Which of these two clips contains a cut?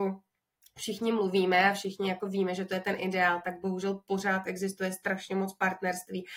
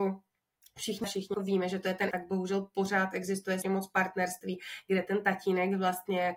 second; 4 cuts; at 1.0 s, 1.3 s, 2.1 s, 3.6 s

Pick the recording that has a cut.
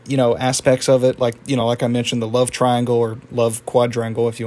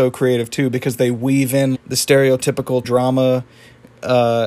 second; 2 cuts; at 1.7 s, 2.8 s

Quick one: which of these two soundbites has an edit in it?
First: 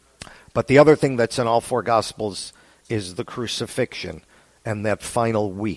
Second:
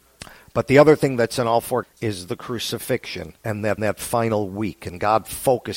second; 3 cuts; at 1.8 s, 3.4 s, 3.8 s

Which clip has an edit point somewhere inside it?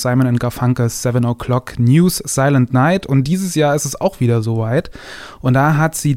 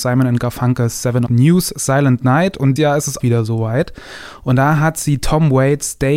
second; 3 cuts; at 1.3 s, 2.8 s, 3.2 s

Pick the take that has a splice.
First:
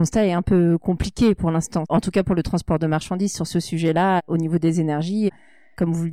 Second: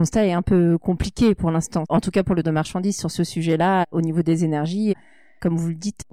second; 1 cut; at 2.4 s

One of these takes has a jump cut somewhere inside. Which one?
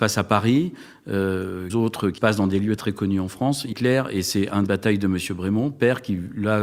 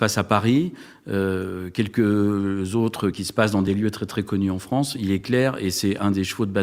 first; 5 cuts; at 1.7 s, 2.2 s, 2.8 s, 3.7 s, 4.7 s

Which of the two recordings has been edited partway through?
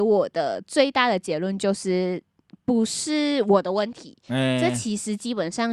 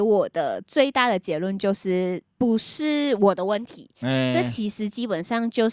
second; 1 cut; at 2.3 s

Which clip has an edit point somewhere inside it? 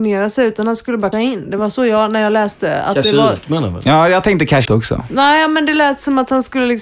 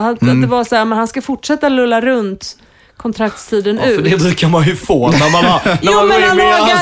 first; 2 cuts; at 1.1 s, 4.7 s

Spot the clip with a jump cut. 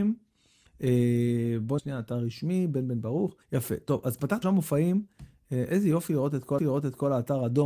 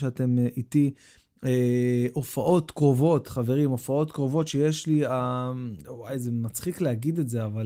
first; 4 cuts; at 1.8 s, 3.4 s, 4.4 s, 6.6 s

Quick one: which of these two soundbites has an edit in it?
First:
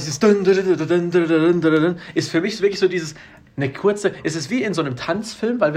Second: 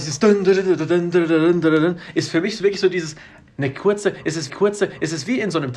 second; 1 cut; at 4.5 s

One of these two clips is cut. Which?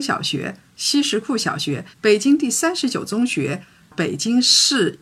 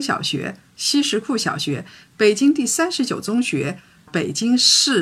first; 1 cut; at 1.9 s

